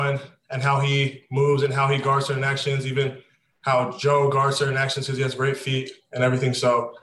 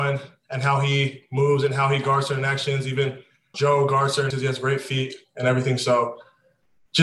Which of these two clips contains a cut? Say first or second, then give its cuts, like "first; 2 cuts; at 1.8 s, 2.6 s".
second; 2 cuts; at 3.5 s, 4.3 s